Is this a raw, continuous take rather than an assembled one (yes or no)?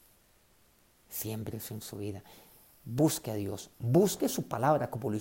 yes